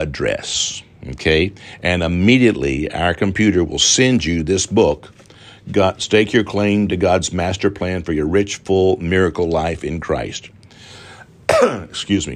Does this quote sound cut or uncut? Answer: uncut